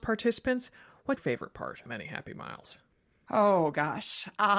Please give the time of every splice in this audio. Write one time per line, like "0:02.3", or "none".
0:01.2
0:01.9

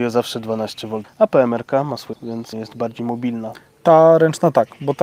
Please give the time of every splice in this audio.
0:01.0
0:02.1
0:02.5

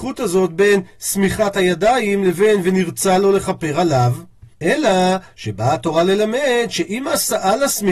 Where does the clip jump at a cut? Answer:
0:04.5

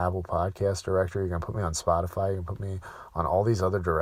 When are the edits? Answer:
none

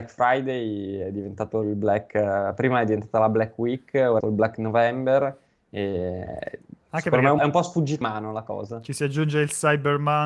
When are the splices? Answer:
0:04.2
0:07.4
0:08.0

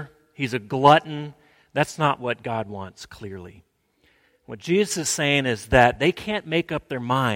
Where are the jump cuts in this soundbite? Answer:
none

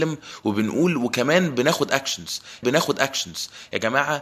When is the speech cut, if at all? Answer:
0:02.6

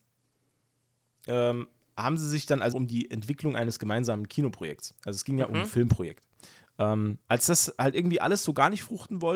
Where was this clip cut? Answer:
0:01.1
0:02.7
0:05.0
0:07.2

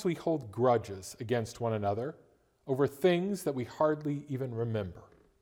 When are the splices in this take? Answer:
none

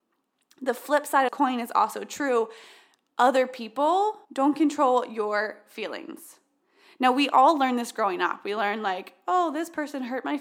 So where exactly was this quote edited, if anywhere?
0:01.3
0:04.2

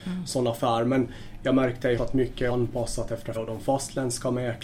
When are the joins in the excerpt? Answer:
0:02.0
0:02.5
0:03.3

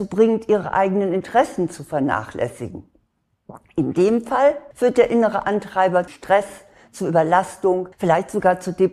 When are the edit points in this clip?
0:04.7
0:06.1
0:07.9

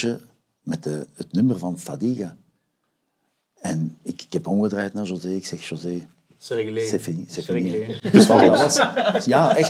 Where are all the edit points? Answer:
none

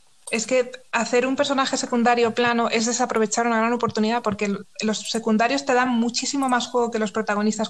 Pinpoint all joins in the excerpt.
none

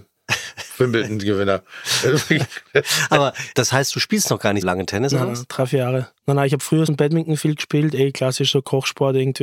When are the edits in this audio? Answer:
0:03.5
0:04.6
0:06.2
0:06.9

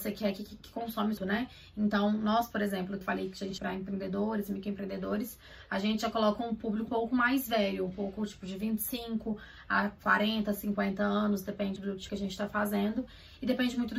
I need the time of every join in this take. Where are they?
0:01.2
0:03.0
0:03.6
0:06.9
0:11.8
0:12.1

